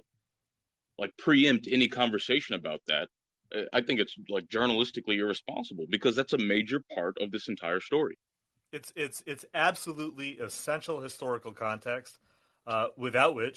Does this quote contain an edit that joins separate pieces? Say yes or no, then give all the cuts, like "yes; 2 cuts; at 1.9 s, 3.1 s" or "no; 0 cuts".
no; 0 cuts